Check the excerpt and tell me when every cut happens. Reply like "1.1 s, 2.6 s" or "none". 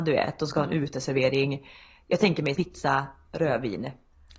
2.5 s